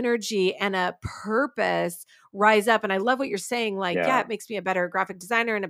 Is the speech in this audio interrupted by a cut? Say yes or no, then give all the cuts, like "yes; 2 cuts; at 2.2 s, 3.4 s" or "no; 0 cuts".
no; 0 cuts